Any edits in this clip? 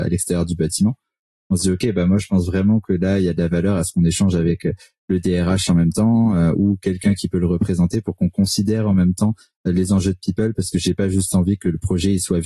no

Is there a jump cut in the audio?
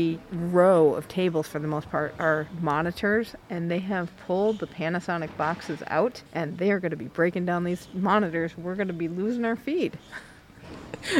yes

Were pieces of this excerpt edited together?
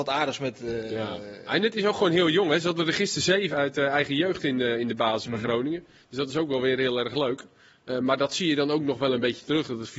yes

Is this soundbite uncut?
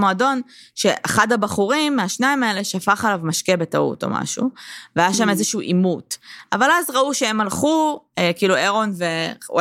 yes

